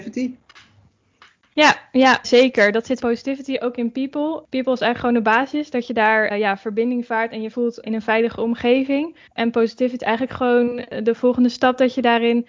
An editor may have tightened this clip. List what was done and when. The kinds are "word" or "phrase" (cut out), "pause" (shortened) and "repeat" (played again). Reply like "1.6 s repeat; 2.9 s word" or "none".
2.2 s word; 3.0 s phrase; 6.3 s word; 7.5 s word; 7.8 s word; 9.3 s pause; 10.0 s word

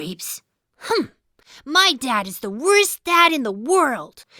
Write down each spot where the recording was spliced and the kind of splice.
none

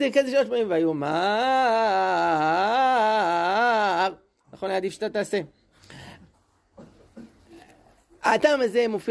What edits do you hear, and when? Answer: none

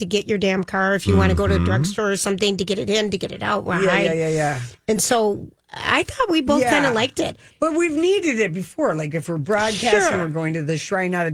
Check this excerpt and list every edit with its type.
none

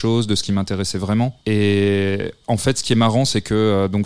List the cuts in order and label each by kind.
1.4 s pause

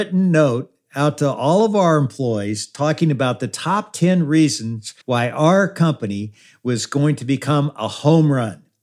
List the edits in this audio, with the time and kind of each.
5.0 s pause

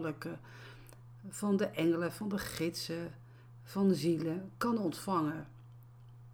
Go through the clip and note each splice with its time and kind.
none

